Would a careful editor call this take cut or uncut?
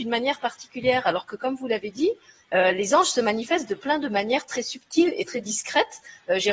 uncut